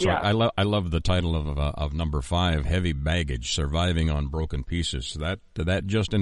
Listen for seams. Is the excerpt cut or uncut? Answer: uncut